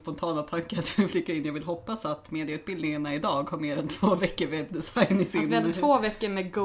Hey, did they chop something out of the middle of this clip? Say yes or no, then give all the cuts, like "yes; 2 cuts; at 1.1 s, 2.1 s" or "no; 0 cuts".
no; 0 cuts